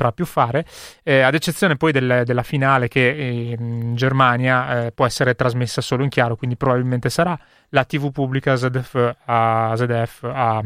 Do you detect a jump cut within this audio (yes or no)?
no